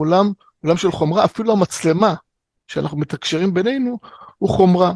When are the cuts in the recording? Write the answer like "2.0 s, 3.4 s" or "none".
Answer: none